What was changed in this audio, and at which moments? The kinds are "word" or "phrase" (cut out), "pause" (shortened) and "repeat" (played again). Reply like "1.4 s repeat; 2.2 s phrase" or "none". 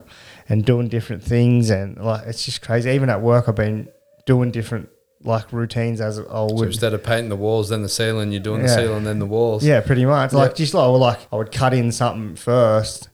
11.3 s pause